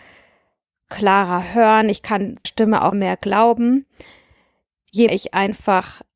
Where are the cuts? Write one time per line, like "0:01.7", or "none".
0:02.4
0:02.9
0:05.1

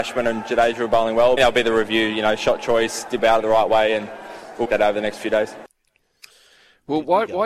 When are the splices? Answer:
0:01.4
0:03.2
0:04.6

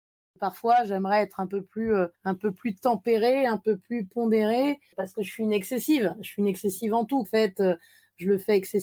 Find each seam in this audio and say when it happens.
0:02.1
0:07.2

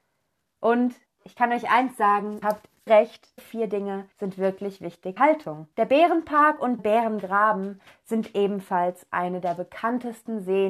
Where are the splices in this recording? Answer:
0:01.1
0:02.4
0:02.9
0:03.4
0:04.1
0:05.2
0:05.7
0:06.8

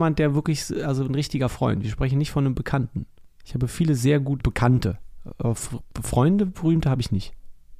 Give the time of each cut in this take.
0:04.4

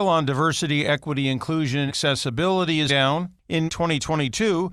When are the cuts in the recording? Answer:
0:01.9
0:02.9
0:03.7

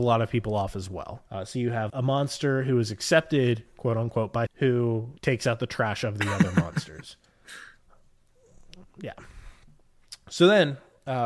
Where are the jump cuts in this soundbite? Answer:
0:01.3
0:01.9
0:04.5
0:05.2

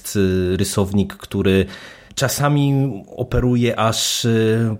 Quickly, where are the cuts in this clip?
0:02.1

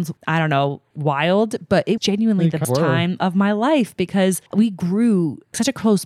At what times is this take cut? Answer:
0:02.0
0:02.6
0:04.5

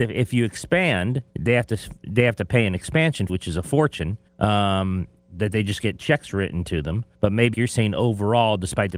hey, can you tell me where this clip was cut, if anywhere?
0:01.3
0:03.3
0:04.3
0:07.1
0:07.5

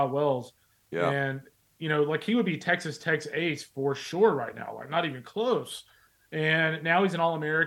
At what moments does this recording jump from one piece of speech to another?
none

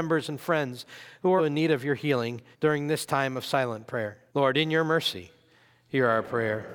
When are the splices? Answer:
0:01.4
0:02.5
0:04.3

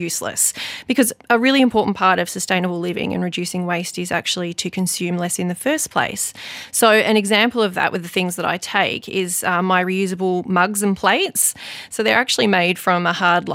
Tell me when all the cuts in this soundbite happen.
none

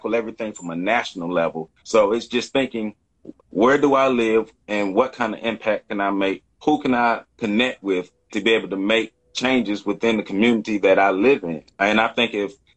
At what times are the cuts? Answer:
0:01.8
0:03.4
0:06.5
0:07.3
0:11.7

